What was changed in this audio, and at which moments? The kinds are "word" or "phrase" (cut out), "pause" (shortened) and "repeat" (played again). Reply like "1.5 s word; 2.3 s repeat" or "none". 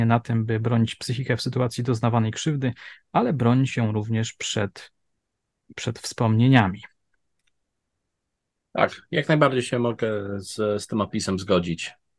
none